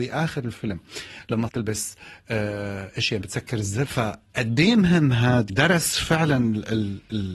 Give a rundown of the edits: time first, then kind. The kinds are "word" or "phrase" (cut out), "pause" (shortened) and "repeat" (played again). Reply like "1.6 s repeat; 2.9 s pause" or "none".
1.5 s word; 3.2 s word; 3.9 s phrase; 5.5 s word